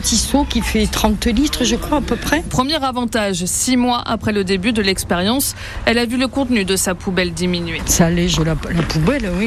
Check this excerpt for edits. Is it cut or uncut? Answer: uncut